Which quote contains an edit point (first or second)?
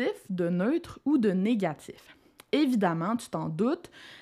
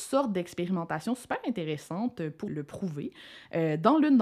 second